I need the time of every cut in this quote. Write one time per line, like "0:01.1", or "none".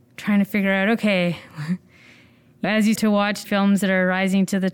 0:02.6
0:03.0
0:03.4